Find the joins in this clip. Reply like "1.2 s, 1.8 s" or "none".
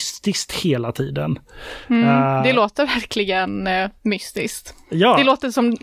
none